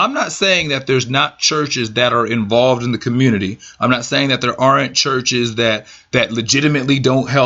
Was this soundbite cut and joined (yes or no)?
no